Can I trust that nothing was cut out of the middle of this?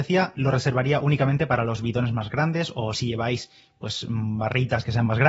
yes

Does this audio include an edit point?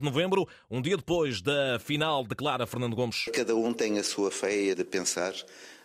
yes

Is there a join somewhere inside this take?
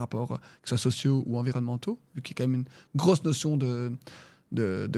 no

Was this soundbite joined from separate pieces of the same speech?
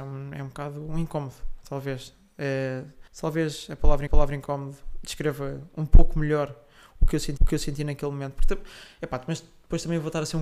yes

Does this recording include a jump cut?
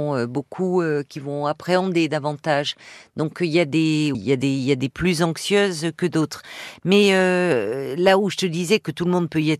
yes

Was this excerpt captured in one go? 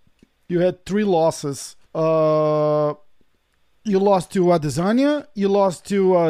no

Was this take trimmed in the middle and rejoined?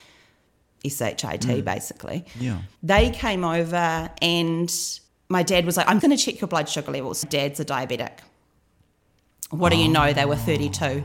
yes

